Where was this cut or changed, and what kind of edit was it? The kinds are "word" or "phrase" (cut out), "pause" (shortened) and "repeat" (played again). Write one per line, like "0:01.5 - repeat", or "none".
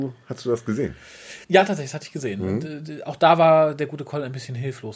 0:01.4 - pause

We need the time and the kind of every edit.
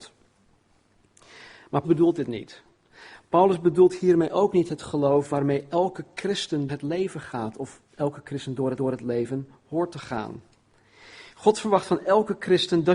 0:01.8 - word
0:06.7 - word
0:07.9 - pause
0:08.8 - repeat

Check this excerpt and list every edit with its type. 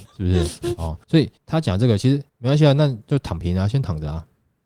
0:01.0 - pause
0:01.4 - pause
0:02.3 - pause

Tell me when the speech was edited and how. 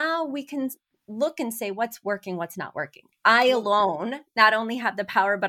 none

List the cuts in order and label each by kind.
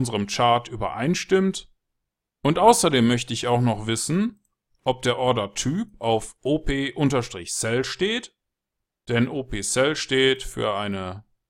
none

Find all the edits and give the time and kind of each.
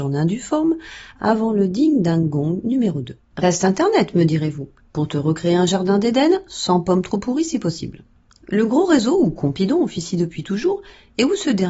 0:03.3 - pause
0:04.8 - pause
0:08.2 - pause

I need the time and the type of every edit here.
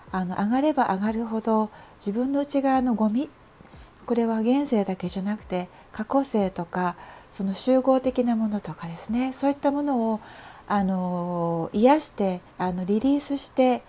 0:12.5 - pause

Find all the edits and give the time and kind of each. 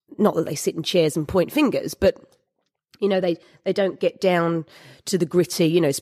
none

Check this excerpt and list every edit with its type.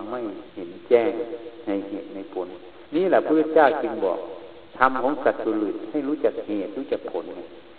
0:02.9 - pause
0:04.7 - pause

